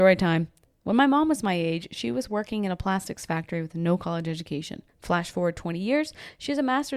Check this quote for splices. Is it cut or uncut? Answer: cut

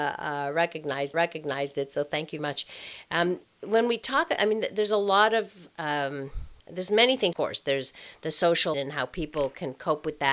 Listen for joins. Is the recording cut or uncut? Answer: cut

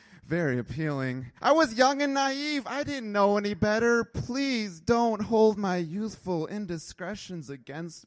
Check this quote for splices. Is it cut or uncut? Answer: cut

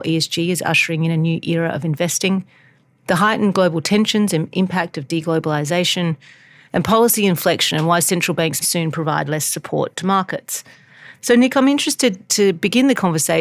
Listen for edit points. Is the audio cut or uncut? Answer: cut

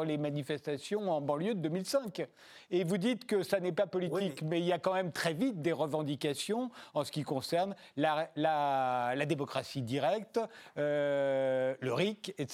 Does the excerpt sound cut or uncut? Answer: uncut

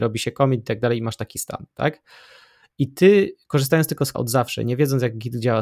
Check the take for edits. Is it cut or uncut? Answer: cut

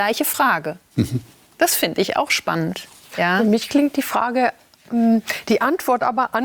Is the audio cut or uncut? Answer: uncut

